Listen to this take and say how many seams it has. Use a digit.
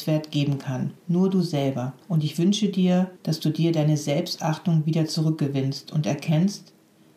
3